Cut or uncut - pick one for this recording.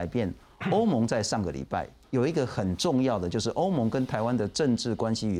cut